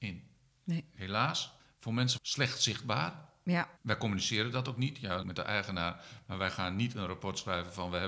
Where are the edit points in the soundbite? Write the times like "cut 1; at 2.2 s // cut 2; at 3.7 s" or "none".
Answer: cut 1; at 1.6 s // cut 2; at 2.2 s // cut 3; at 3.8 s // cut 4; at 5.2 s